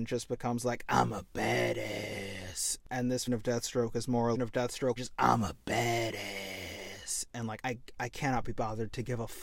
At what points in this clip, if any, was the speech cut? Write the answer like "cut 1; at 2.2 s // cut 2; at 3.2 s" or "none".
cut 1; at 3.3 s // cut 2; at 4.3 s // cut 3; at 5.0 s // cut 4; at 7.6 s